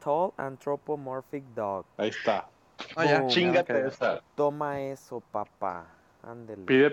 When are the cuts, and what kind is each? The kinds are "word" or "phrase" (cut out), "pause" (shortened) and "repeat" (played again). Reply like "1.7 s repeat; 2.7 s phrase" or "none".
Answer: 1.9 s pause; 4.3 s pause